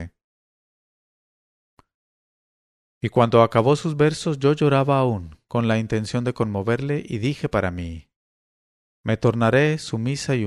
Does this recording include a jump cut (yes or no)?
no